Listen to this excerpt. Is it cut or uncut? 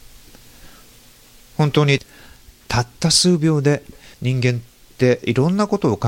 cut